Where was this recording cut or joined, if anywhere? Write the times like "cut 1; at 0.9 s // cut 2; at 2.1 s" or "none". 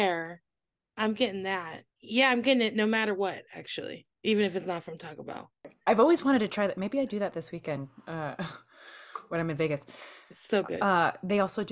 cut 1; at 1.9 s // cut 2; at 4.1 s